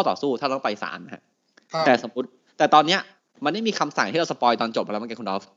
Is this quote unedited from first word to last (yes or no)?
yes